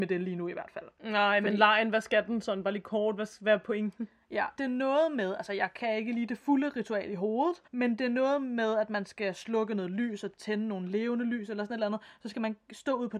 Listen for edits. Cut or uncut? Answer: cut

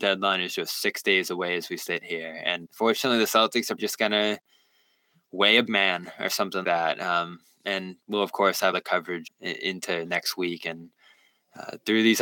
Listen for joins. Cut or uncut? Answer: cut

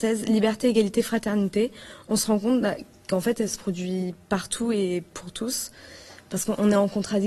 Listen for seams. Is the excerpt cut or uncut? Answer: uncut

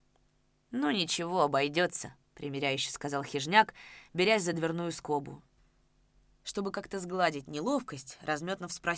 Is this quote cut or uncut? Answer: uncut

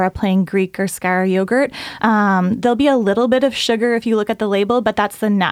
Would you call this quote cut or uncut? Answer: uncut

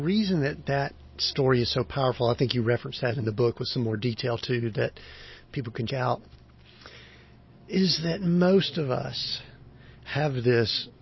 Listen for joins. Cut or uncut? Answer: cut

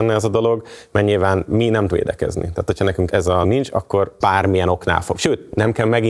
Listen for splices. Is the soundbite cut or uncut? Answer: cut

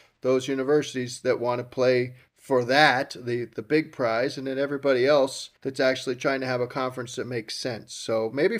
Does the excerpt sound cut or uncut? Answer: cut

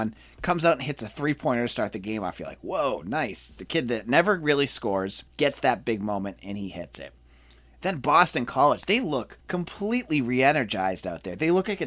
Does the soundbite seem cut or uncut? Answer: cut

